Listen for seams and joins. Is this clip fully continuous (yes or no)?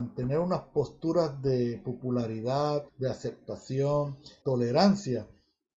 no